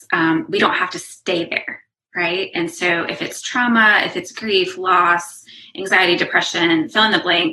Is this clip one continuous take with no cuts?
yes; 0 cuts

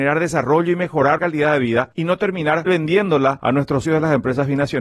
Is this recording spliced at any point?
yes; 3 cuts; at 1.2 s, 2.7 s, 3.8 s

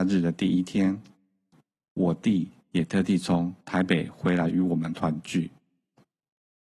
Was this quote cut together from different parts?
no; 0 cuts

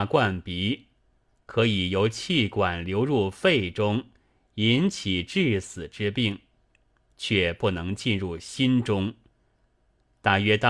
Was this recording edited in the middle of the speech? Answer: no; 0 cuts

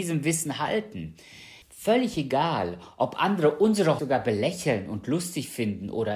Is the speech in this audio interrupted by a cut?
yes; 2 cuts; at 1.6 s, 4.0 s

